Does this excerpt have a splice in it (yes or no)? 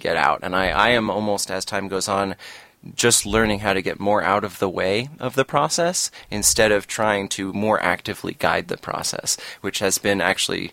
no